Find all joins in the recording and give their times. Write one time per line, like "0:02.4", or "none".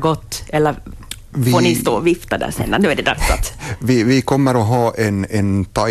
none